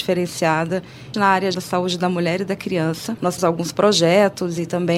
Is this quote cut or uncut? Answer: cut